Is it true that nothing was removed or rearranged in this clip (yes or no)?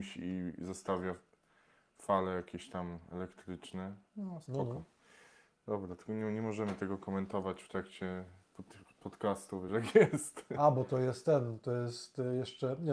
yes